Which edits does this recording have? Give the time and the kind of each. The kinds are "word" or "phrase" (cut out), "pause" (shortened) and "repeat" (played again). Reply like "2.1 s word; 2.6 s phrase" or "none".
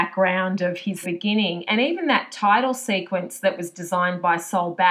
1.0 s word